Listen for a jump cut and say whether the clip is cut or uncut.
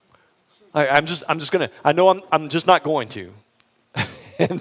cut